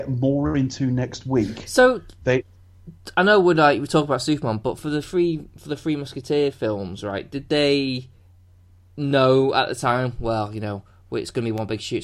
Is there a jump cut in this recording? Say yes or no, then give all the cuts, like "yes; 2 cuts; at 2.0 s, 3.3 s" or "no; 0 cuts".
no; 0 cuts